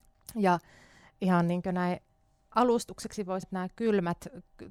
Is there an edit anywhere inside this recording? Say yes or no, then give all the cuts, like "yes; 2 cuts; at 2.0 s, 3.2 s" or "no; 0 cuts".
yes; 1 cut; at 3.4 s